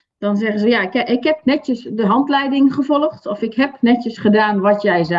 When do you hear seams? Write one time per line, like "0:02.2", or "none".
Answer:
none